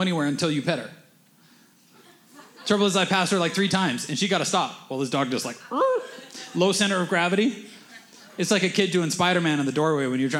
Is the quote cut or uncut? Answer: uncut